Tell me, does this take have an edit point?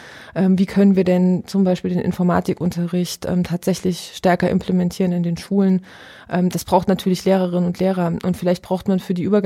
no; 0 cuts

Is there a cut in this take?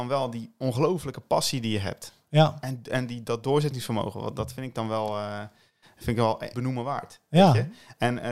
yes; 1 cut; at 6.5 s

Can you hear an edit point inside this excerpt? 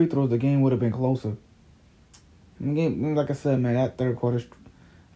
no; 0 cuts

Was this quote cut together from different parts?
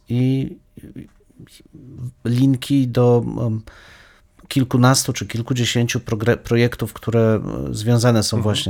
no; 0 cuts

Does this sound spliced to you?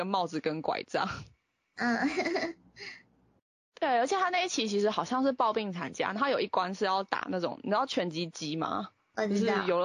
no; 0 cuts

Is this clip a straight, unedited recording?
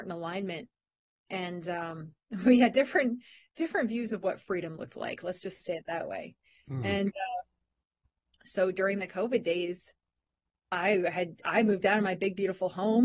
yes; 0 cuts

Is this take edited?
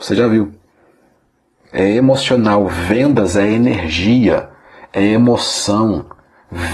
no; 0 cuts

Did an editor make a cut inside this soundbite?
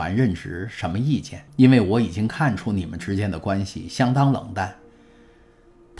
yes; 1 cut; at 1.5 s

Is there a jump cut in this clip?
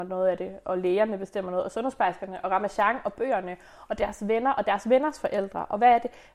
no; 0 cuts

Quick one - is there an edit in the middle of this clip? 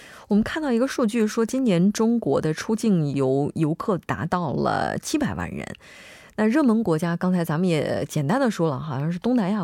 no; 0 cuts

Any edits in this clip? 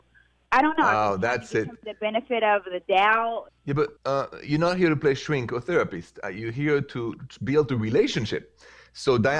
yes; 2 cuts; at 3.6 s, 4.0 s

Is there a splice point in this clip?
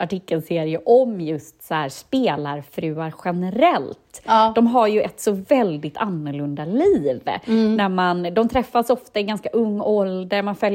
no; 0 cuts

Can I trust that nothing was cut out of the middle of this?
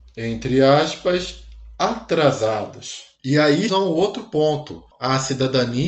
no; 1 cut; at 3.7 s

